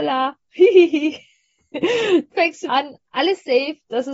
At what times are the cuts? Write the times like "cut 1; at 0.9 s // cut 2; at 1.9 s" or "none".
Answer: cut 1; at 2.3 s // cut 2; at 2.7 s